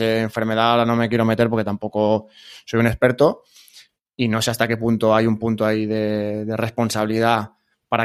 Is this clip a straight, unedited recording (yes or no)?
yes